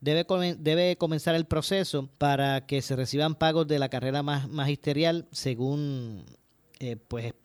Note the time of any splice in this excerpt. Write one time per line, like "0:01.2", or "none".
0:02.2